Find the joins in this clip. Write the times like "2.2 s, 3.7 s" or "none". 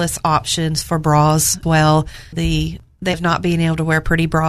1.6 s, 2.3 s, 3.1 s